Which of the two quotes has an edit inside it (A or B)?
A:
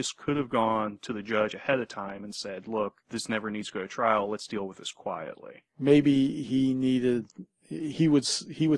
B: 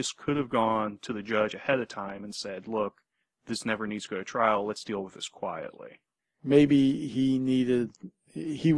A